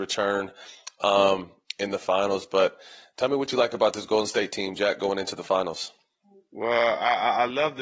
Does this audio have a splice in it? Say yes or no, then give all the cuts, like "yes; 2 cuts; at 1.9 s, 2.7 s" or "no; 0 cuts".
no; 0 cuts